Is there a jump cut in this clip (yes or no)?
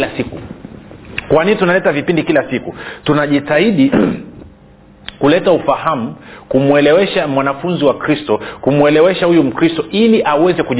no